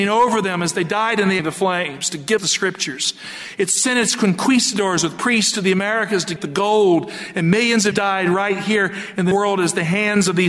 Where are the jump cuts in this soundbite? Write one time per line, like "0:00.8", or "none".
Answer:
0:01.4
0:02.4
0:06.4
0:07.9
0:09.3